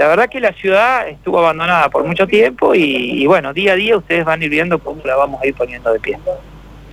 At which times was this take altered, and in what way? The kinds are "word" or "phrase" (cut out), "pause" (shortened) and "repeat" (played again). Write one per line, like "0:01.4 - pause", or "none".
none